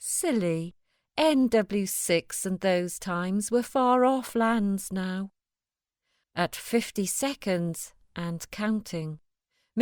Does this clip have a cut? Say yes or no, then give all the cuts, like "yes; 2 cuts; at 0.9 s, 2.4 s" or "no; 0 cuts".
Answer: no; 0 cuts